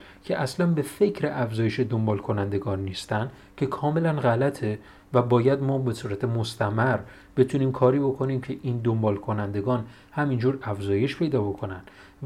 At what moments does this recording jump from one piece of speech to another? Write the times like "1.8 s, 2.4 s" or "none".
none